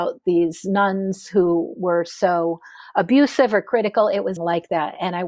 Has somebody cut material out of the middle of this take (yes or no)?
yes